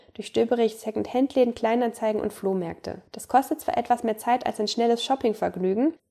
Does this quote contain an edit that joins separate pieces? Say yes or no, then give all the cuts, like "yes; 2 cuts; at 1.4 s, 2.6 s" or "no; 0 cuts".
yes; 1 cut; at 3.1 s